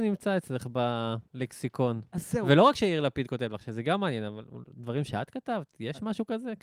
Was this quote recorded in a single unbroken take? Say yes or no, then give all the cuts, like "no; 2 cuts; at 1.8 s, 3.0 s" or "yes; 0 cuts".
no; 1 cut; at 1.3 s